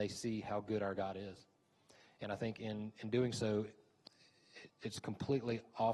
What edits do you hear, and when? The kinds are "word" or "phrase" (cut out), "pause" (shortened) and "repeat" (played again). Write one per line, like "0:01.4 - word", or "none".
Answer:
0:04.7 - word

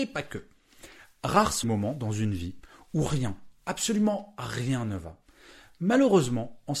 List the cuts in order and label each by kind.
0:01.6 - word

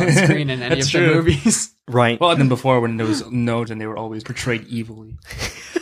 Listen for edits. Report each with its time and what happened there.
0:02.4 - phrase
0:03.7 - word
0:04.2 - word

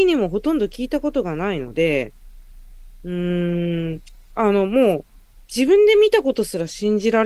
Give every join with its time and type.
0:05.3 - pause

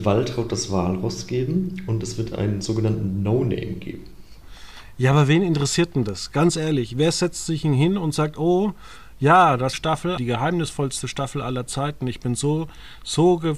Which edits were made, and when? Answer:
0:09.7 - phrase
0:10.2 - phrase

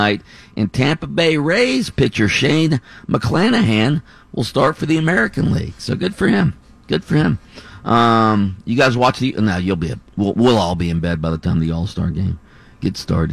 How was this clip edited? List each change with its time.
0:10.1 - word

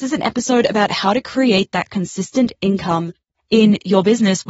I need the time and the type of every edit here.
none

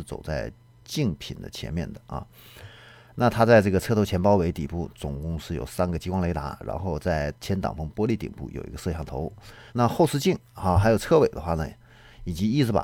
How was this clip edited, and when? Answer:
0:09.7 - pause

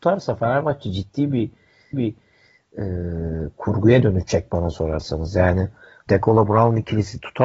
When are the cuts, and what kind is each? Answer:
0:01.9 - repeat
0:06.1 - word

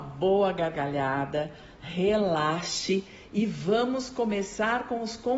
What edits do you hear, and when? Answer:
none

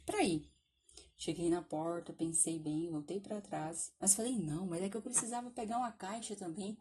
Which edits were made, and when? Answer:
0:04.0 - pause

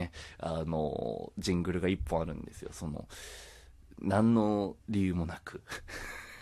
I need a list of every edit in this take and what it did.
none

